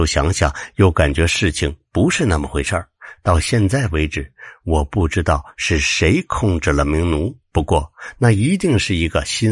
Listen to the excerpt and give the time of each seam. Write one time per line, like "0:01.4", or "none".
0:07.4